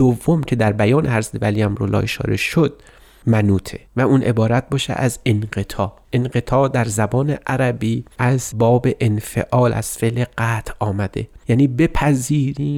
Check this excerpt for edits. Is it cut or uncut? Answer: cut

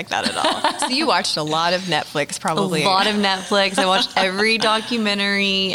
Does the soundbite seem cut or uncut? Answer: uncut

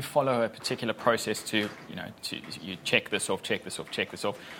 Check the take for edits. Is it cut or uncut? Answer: uncut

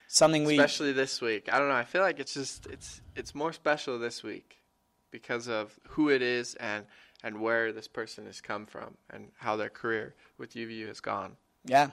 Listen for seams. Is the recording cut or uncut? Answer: uncut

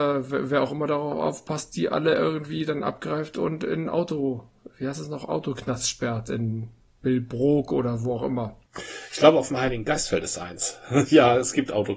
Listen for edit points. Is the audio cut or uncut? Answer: uncut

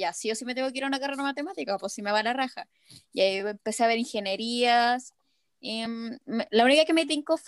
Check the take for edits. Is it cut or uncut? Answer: uncut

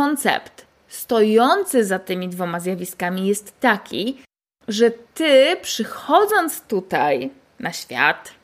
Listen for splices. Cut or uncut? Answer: uncut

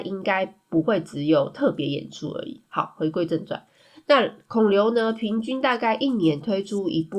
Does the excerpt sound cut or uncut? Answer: uncut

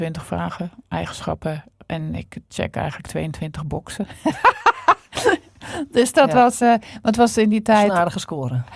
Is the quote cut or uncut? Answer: uncut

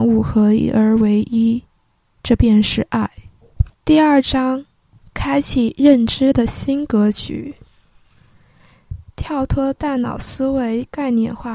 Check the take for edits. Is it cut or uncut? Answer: cut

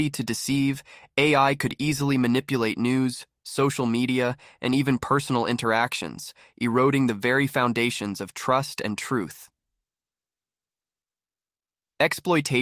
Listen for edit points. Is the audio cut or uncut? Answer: uncut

